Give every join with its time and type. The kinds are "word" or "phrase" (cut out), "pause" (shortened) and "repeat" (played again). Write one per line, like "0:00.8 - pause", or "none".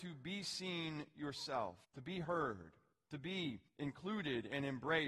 0:01.8 - pause
0:02.9 - pause
0:03.7 - pause